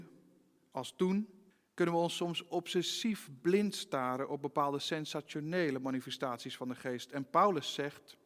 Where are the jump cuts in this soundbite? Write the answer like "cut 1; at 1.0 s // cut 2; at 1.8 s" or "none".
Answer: cut 1; at 1.5 s

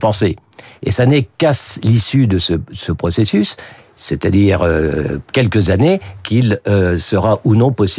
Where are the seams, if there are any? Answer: none

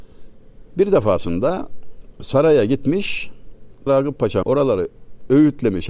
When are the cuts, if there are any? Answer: cut 1; at 3.9 s // cut 2; at 4.4 s

